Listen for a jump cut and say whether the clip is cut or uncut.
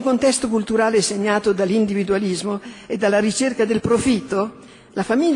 uncut